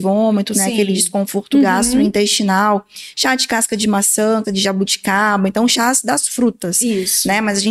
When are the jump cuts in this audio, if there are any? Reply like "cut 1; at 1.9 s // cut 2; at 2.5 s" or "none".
cut 1; at 4.4 s